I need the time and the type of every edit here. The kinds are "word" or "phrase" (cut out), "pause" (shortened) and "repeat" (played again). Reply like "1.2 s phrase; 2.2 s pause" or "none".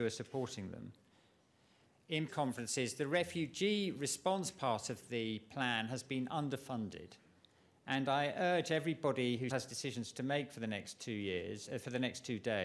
2.3 s word; 9.5 s word